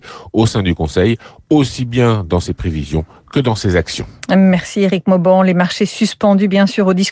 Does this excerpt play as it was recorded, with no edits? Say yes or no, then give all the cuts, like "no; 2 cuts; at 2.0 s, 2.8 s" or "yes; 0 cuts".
yes; 0 cuts